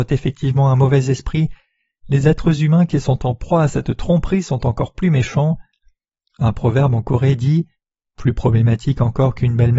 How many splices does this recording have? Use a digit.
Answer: 0